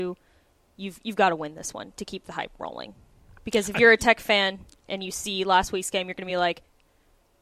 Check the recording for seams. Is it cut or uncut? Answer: uncut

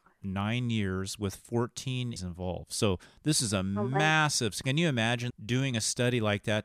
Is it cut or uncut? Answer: cut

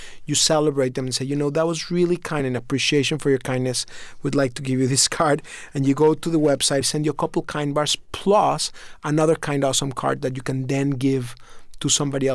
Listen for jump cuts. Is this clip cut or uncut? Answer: cut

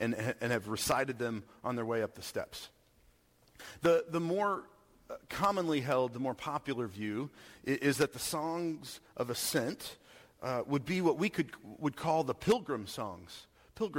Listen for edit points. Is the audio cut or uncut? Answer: uncut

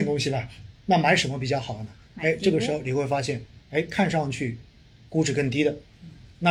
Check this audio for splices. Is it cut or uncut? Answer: uncut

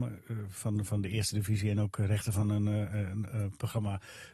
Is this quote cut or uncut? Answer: uncut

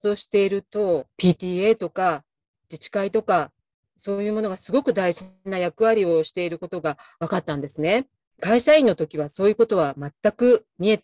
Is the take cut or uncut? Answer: uncut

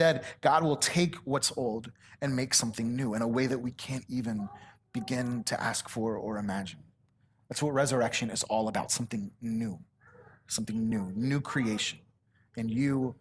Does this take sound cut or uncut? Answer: uncut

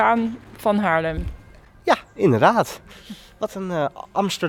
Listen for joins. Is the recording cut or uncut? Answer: uncut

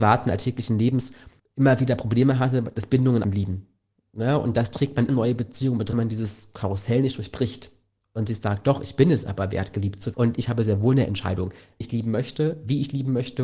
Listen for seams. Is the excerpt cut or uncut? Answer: cut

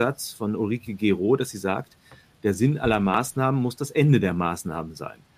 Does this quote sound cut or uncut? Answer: uncut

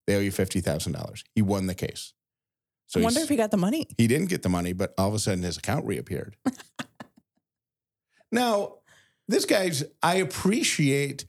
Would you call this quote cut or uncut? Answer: uncut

